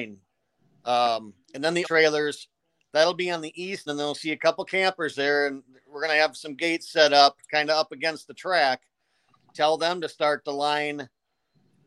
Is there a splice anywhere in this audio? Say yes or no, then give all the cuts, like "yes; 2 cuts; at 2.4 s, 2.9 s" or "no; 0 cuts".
yes; 3 cuts; at 1.4 s, 1.8 s, 3.9 s